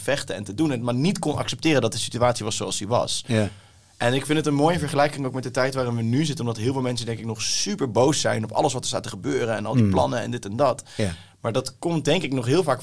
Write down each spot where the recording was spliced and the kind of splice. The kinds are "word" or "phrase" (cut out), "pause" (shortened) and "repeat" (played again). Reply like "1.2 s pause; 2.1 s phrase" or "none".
none